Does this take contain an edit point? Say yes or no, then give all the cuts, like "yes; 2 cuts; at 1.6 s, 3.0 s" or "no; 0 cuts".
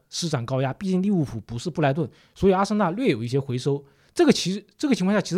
no; 0 cuts